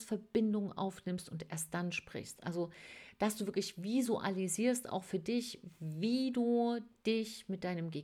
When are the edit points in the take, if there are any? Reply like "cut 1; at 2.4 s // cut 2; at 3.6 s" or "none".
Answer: none